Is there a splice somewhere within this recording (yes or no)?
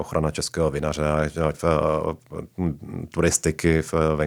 yes